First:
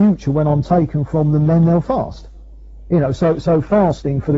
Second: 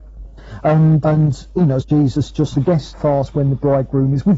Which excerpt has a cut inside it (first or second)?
second